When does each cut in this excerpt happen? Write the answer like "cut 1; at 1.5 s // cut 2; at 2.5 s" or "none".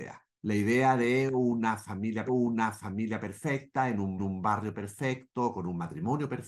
cut 1; at 2.3 s // cut 2; at 4.2 s